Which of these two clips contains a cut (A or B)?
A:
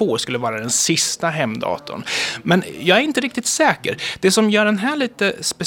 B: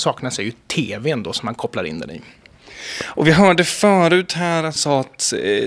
B